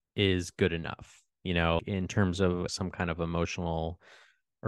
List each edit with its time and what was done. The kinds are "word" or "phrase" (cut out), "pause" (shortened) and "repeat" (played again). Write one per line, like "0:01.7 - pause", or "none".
0:01.8 - word
0:02.7 - word